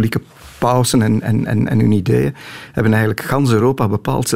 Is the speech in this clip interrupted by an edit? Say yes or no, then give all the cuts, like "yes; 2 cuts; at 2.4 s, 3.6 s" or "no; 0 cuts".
no; 0 cuts